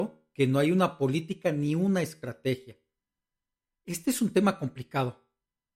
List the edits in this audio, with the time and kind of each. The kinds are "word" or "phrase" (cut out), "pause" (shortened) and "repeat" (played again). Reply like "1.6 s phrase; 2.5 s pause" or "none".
none